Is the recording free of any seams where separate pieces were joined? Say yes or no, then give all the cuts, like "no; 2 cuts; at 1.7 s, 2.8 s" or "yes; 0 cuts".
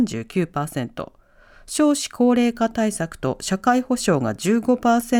yes; 0 cuts